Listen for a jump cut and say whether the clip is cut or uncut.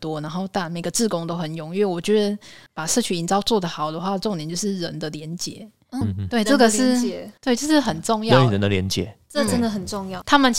cut